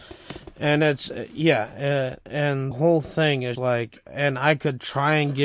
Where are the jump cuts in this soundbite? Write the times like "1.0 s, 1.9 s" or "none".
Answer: 2.7 s, 3.5 s

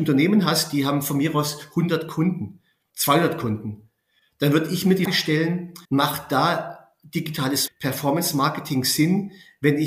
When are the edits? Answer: 2.9 s, 5.1 s, 5.8 s, 7.7 s

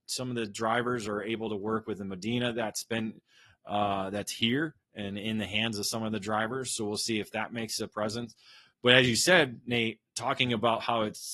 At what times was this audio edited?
none

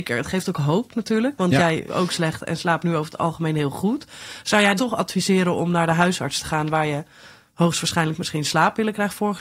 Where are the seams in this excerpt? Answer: 1.9 s, 4.8 s

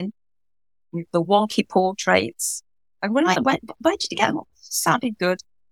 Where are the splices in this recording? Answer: 1.1 s, 3.3 s, 4.5 s

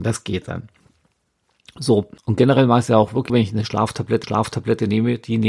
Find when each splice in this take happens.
2.2 s, 3.3 s, 4.2 s

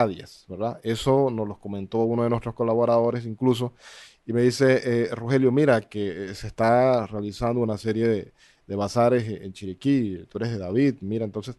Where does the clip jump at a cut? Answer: none

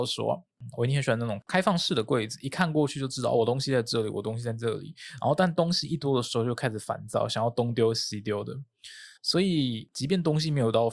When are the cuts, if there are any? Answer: 9.2 s

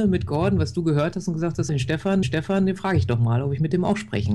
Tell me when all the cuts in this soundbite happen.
1.7 s, 2.2 s

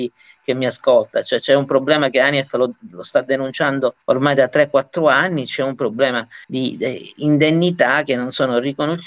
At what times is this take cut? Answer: 4.0 s, 6.4 s

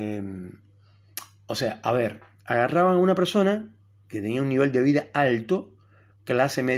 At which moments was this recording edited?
none

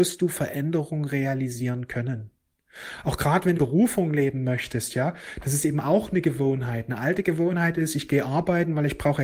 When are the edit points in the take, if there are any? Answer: 3.5 s

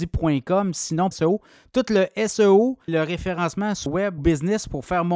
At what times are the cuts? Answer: 1.1 s, 2.9 s, 3.9 s, 4.2 s

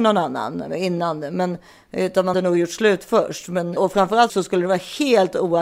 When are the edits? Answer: 2.3 s, 3.8 s, 4.3 s

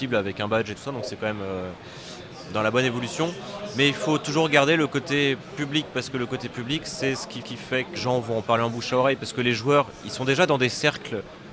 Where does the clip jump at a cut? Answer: 7.4 s, 8.0 s

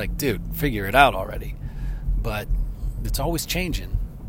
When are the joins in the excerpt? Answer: none

